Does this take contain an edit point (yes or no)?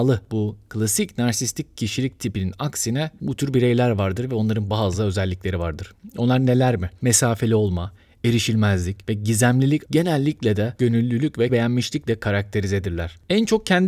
yes